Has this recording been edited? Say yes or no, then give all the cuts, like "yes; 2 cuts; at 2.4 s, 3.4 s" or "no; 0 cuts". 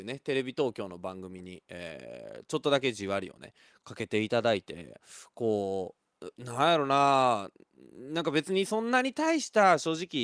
no; 0 cuts